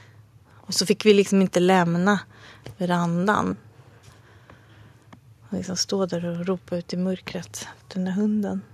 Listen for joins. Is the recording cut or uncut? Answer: uncut